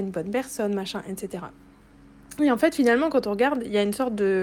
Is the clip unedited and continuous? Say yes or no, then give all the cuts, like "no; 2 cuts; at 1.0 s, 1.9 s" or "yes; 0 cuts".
yes; 0 cuts